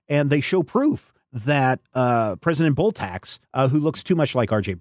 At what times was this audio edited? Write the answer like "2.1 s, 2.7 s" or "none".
3.4 s